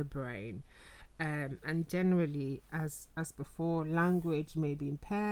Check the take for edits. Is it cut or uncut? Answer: cut